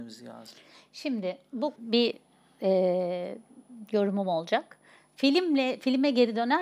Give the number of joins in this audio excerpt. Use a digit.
1